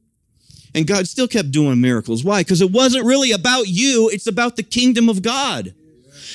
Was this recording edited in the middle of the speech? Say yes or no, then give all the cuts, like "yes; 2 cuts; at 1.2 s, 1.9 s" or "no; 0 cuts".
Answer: no; 0 cuts